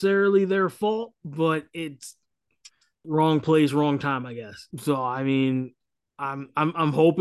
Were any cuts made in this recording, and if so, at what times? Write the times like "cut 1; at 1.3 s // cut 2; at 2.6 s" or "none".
cut 1; at 1.2 s // cut 2; at 3.0 s // cut 3; at 4.7 s

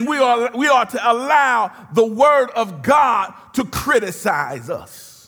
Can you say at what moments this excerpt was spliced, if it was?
none

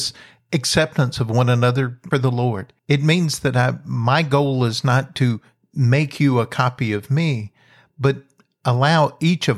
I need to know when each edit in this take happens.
cut 1; at 2.1 s // cut 2; at 2.8 s

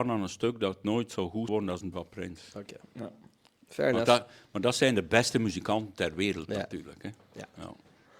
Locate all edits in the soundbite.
cut 1; at 1.5 s // cut 2; at 1.9 s

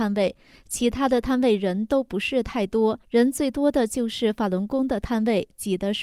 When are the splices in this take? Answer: cut 1; at 3.0 s

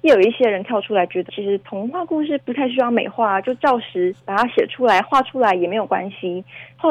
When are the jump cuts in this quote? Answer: cut 1; at 1.3 s // cut 2; at 4.2 s

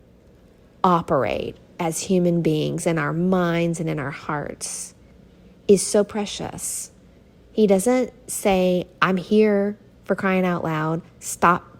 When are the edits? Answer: none

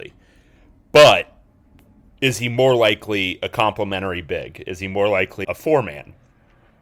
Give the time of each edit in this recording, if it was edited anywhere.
cut 1; at 5.4 s

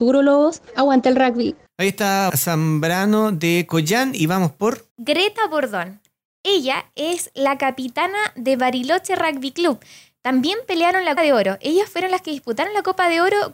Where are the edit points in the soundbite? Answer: cut 1; at 2.3 s // cut 2; at 4.9 s // cut 3; at 11.2 s

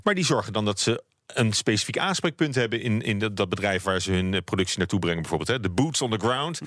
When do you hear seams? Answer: none

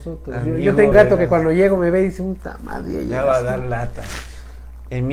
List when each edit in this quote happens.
cut 1; at 0.9 s

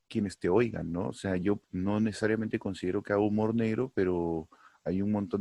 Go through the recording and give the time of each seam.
cut 1; at 1.6 s

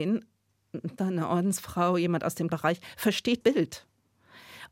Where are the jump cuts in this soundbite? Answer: cut 1; at 1.0 s // cut 2; at 2.5 s // cut 3; at 3.4 s

